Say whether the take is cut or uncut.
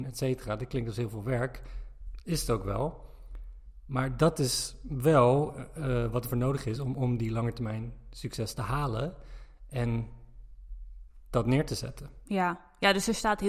uncut